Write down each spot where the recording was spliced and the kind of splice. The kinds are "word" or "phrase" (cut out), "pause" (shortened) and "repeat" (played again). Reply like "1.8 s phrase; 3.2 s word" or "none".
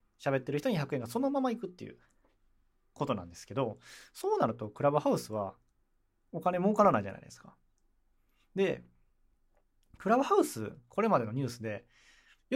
none